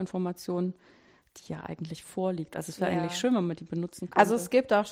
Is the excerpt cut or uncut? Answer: uncut